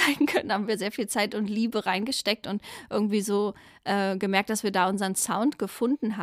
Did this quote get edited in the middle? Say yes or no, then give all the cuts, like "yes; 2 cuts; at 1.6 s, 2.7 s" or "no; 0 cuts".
no; 0 cuts